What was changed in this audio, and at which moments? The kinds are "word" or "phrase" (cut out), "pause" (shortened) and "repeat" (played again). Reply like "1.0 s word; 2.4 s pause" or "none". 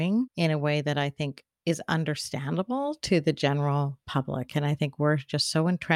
4.0 s pause

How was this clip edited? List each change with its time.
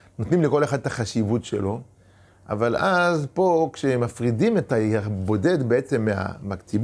none

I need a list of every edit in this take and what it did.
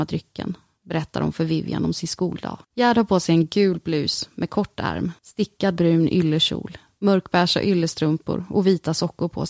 2.6 s pause; 5.2 s pause

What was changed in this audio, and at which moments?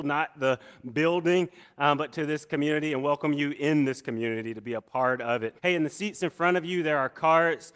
5.6 s pause

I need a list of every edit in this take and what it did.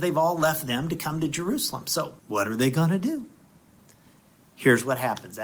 2.2 s pause

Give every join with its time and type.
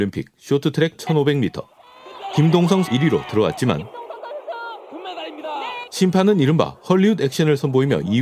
0.9 s word; 2.8 s word

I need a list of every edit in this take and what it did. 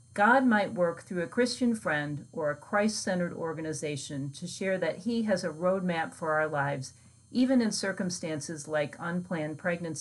none

